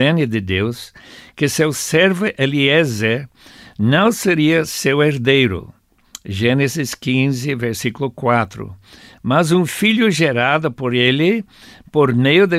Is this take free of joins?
yes; 0 cuts

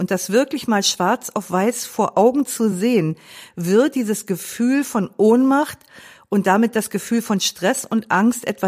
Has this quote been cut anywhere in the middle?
no; 0 cuts

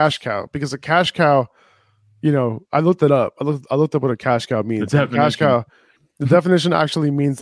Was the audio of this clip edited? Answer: no; 0 cuts

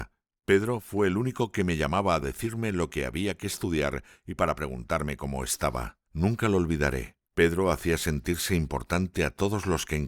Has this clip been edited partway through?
yes; 3 cuts; at 2.2 s, 6.1 s, 7.3 s

